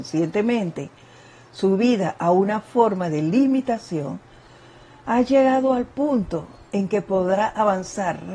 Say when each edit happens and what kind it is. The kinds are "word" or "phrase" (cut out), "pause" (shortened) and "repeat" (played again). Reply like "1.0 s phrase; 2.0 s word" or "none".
none